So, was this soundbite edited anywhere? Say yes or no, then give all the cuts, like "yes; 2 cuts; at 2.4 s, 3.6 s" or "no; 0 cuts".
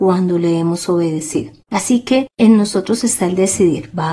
yes; 1 cut; at 1.6 s